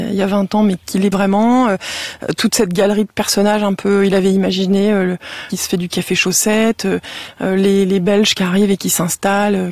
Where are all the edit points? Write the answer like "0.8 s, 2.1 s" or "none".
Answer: 1.1 s, 5.5 s